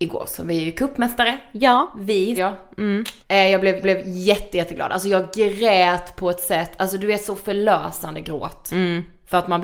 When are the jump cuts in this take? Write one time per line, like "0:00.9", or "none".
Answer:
0:02.4
0:03.2
0:03.8